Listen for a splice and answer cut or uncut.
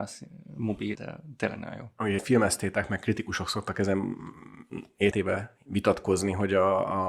cut